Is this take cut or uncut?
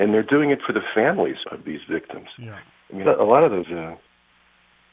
cut